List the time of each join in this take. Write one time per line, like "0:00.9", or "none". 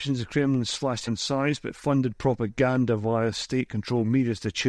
0:01.1